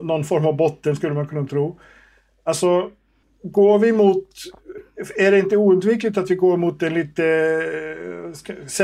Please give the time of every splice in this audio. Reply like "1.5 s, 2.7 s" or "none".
3.2 s